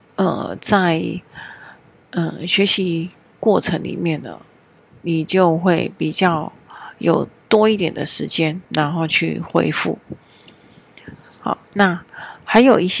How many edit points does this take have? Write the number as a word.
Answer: one